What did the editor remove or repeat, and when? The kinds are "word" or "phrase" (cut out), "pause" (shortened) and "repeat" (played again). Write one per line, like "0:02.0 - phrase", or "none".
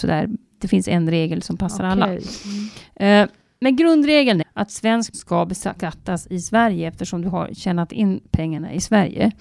0:04.4 - word
0:05.1 - word